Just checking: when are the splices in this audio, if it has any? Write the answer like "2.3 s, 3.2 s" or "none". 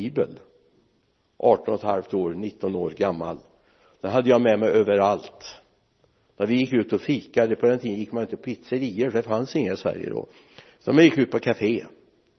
none